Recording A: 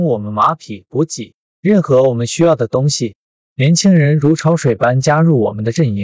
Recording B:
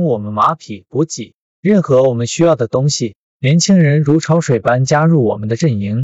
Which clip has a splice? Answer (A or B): B